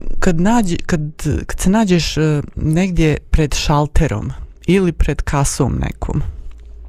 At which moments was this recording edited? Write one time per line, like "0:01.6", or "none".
none